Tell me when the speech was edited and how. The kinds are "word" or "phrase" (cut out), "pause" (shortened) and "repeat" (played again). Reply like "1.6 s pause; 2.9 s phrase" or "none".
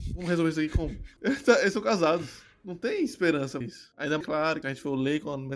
3.6 s word; 4.2 s phrase; 4.6 s phrase